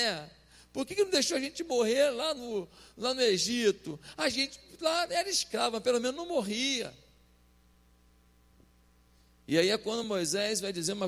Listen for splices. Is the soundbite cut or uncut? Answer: uncut